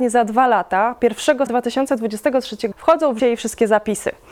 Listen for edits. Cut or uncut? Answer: cut